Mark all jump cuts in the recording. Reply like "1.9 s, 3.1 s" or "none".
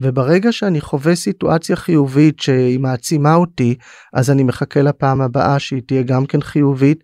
none